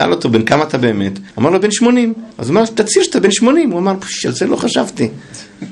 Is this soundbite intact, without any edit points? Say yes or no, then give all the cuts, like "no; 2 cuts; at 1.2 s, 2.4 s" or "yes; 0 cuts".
no; 2 cuts; at 1.3 s, 2.3 s